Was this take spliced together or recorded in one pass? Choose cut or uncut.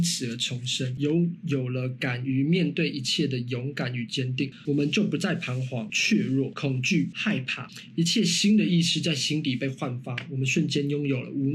uncut